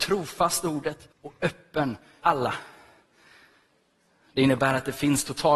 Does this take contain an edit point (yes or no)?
yes